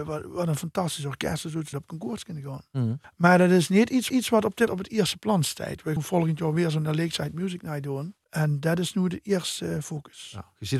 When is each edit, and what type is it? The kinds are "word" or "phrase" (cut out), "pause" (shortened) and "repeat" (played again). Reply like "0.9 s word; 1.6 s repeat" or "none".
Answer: 1.7 s phrase; 3.0 s pause; 4.1 s repeat; 4.7 s word; 6.0 s word; 8.2 s pause